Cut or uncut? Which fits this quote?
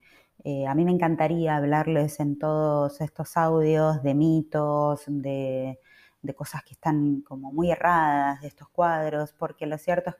uncut